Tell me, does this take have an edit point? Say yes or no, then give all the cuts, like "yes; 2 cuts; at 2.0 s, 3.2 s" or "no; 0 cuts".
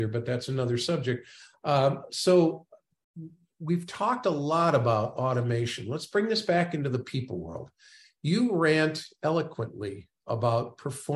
no; 0 cuts